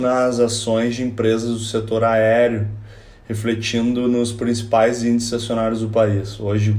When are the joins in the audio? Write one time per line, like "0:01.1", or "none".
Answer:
none

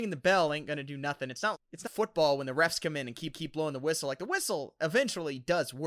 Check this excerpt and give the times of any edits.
0:01.5
0:01.9
0:03.3

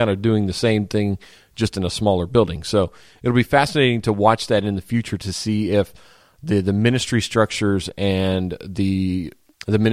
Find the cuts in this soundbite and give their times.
none

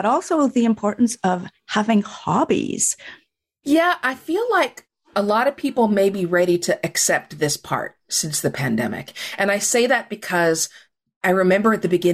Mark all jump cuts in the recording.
none

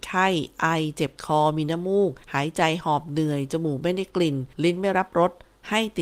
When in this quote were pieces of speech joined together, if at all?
0:02.2
0:04.5

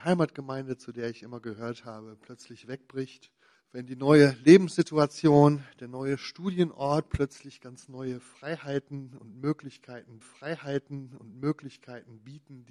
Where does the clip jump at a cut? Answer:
0:03.5
0:10.2

